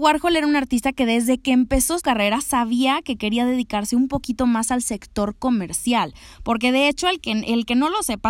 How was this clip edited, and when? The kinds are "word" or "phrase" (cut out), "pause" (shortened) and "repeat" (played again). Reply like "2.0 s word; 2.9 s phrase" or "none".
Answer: 2.0 s word